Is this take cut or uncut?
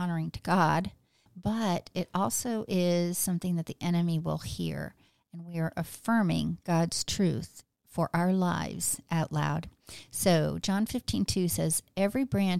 uncut